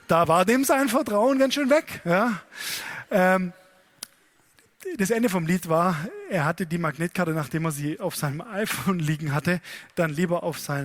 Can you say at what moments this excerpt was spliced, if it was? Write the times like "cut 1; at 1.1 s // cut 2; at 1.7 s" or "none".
none